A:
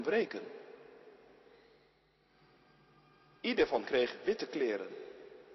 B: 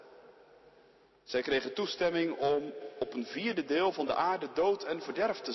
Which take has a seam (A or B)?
A